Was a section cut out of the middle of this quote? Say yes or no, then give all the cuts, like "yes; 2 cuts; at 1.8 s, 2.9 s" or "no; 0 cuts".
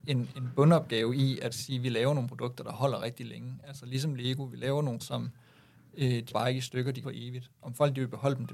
yes; 4 cuts; at 1.5 s, 5.0 s, 6.3 s, 7.0 s